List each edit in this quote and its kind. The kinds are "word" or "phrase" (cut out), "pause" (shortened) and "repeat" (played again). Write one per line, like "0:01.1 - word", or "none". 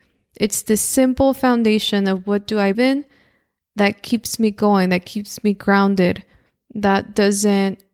0:02.7 - word

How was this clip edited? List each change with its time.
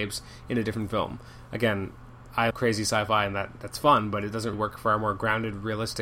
0:02.5 - word
0:04.5 - word

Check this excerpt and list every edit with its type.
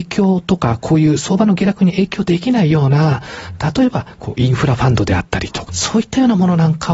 0:05.7 - phrase

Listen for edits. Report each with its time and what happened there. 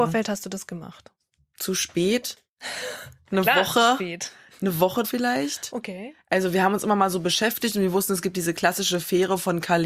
0:05.0 - word

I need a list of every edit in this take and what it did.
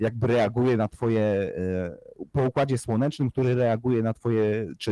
none

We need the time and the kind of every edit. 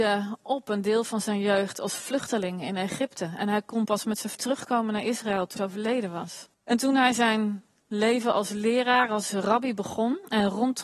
0:04.3 - word
0:05.6 - word
0:06.5 - pause

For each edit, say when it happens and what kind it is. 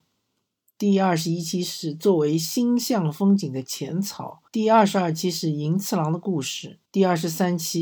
0:04.5 - pause
0:06.9 - pause

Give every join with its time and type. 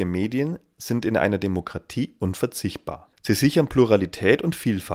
0:03.1 - pause

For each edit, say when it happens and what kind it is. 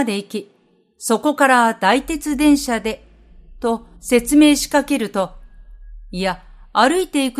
0:04.0 - pause

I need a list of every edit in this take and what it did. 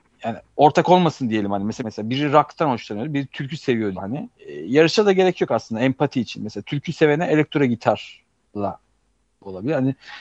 0:01.8 - phrase
0:03.9 - word
0:04.4 - pause

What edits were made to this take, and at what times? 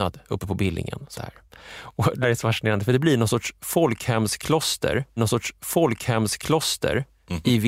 0:01.1 - phrase
0:02.2 - word
0:05.2 - repeat

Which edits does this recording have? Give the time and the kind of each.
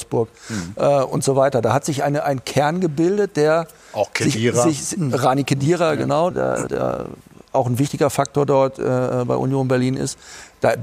0:06.3 - word
0:06.7 - word

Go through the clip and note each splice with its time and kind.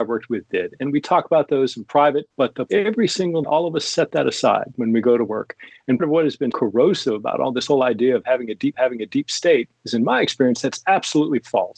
0:02.3 - pause
0:02.7 - phrase
0:03.4 - word
0:06.0 - word
0:06.5 - word
0:08.7 - repeat

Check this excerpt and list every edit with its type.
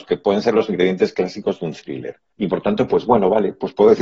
0:02.3 - pause

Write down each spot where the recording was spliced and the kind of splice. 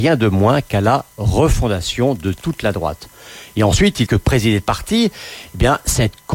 0:04.1 - phrase

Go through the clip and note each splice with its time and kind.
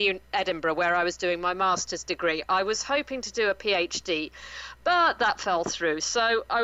none

